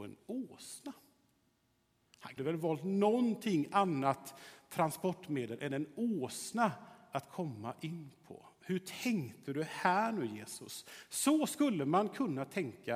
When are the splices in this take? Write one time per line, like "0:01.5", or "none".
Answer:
0:02.4